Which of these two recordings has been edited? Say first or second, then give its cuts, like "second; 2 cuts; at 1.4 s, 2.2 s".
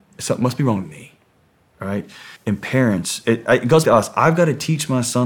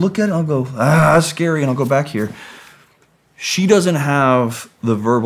first; 3 cuts; at 2.4 s, 3.2 s, 3.8 s